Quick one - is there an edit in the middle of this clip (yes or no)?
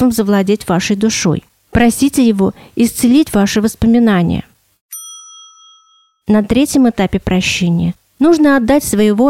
no